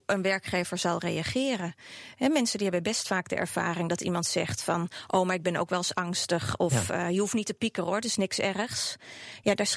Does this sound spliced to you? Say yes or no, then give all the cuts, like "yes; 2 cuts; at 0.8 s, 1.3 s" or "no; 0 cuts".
no; 0 cuts